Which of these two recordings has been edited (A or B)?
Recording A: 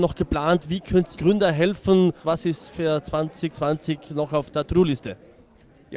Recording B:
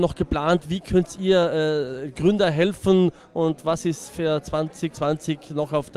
A